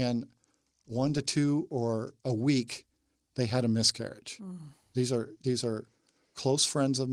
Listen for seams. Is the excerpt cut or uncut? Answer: cut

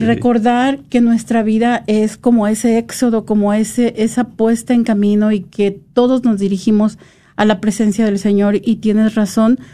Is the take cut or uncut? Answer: uncut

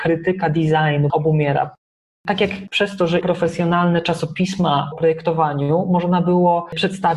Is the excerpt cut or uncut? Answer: cut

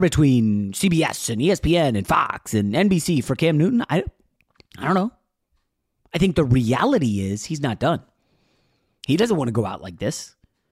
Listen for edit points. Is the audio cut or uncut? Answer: uncut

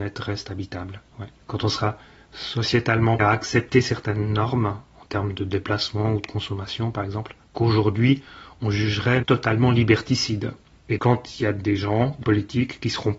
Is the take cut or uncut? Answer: cut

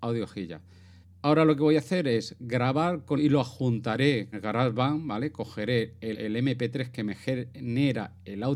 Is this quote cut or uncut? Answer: cut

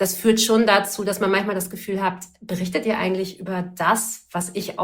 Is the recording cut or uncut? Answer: uncut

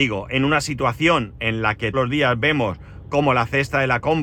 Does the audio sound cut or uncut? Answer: cut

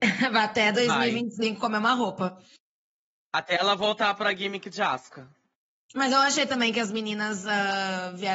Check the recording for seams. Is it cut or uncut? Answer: uncut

